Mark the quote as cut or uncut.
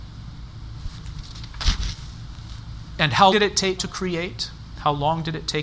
cut